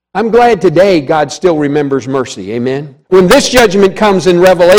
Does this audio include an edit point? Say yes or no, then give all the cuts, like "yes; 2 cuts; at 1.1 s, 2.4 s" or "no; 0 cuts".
yes; 1 cut; at 3.0 s